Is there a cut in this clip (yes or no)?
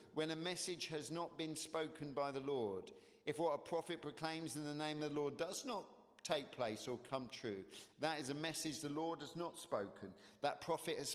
no